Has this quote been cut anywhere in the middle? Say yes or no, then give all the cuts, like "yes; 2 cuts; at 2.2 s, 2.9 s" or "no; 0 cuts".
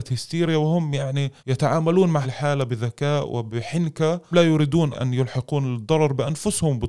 yes; 4 cuts; at 1.4 s, 2.2 s, 4.3 s, 4.9 s